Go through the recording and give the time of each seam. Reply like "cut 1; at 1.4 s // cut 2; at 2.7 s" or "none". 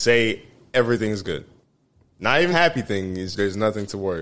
cut 1; at 1.2 s // cut 2; at 2.5 s // cut 3; at 3.3 s